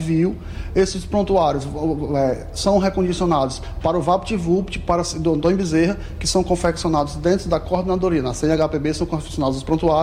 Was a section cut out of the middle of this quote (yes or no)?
no